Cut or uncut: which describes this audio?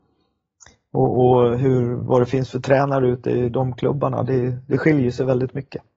uncut